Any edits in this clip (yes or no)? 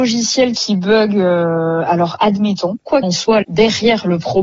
yes